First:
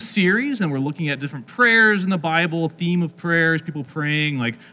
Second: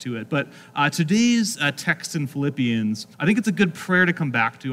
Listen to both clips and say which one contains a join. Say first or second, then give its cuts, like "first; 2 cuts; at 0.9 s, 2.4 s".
second; 1 cut; at 3.1 s